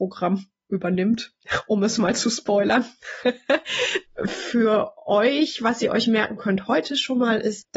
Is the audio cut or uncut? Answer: uncut